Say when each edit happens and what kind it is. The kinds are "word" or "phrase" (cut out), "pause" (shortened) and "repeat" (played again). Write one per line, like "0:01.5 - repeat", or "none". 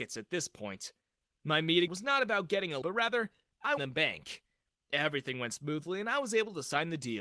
0:01.9 - phrase
0:02.8 - word
0:03.8 - phrase